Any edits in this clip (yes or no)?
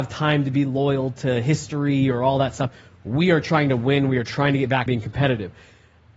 yes